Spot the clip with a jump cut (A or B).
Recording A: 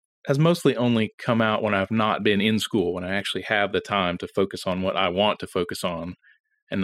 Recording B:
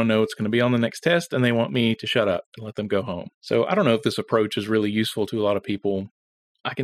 B